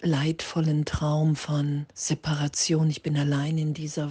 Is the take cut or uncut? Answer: cut